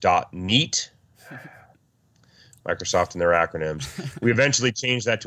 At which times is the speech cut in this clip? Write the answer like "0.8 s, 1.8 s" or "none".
none